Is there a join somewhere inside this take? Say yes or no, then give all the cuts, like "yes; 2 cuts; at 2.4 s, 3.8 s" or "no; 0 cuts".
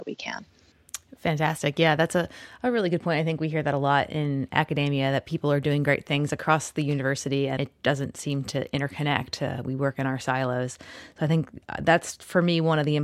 yes; 1 cut; at 7.6 s